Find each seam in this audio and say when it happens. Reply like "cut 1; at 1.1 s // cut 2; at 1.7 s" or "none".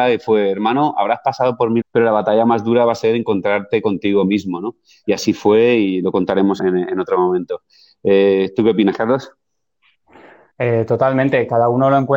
cut 1; at 1.8 s // cut 2; at 6.6 s